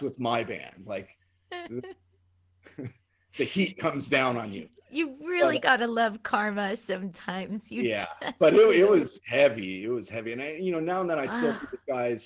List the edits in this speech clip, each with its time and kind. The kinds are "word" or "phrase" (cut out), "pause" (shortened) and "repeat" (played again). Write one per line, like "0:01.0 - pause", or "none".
none